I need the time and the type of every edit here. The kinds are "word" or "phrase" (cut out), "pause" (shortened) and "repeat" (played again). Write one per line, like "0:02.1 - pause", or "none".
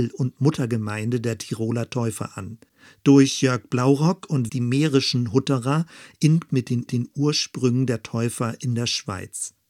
0:04.5 - phrase
0:06.5 - word
0:06.9 - repeat

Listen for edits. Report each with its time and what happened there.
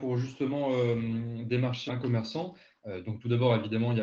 0:01.9 - word

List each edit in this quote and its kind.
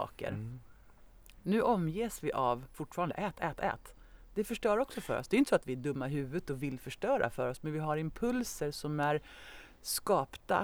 0:02.7 - phrase

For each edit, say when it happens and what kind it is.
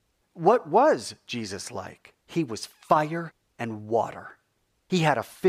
0:02.2 - pause

